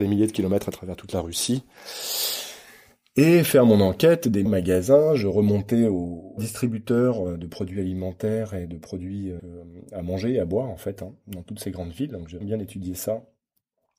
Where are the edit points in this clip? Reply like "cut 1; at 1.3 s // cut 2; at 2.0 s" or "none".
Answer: cut 1; at 4.5 s // cut 2; at 6.4 s // cut 3; at 9.4 s // cut 4; at 12.4 s